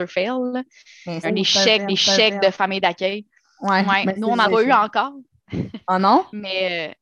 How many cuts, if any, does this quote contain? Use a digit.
3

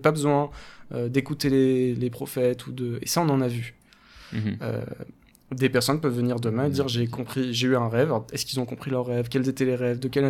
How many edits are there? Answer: 0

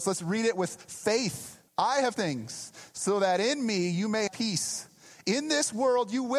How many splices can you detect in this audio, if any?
3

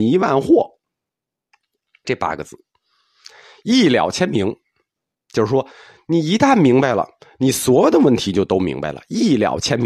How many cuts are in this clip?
1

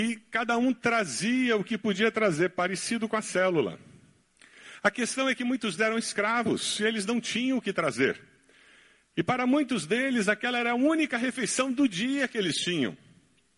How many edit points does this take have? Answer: 1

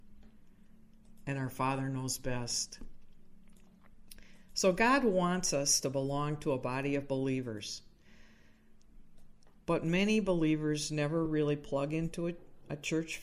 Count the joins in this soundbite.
0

